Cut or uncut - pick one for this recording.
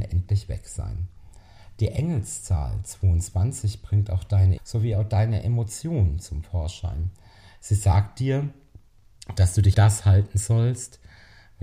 cut